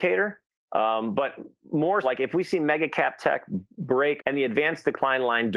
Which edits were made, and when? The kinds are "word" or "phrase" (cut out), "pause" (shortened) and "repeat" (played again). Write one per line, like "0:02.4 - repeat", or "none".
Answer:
0:02.0 - word
0:04.2 - word